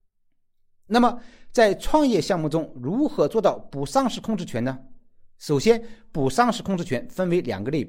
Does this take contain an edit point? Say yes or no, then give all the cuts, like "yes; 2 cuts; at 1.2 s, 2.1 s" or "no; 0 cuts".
no; 0 cuts